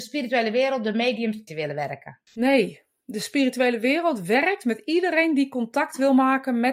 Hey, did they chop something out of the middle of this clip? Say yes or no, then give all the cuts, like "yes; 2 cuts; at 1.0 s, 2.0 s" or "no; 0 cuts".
yes; 2 cuts; at 1.5 s, 2.3 s